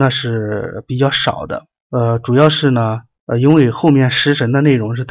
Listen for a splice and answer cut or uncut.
cut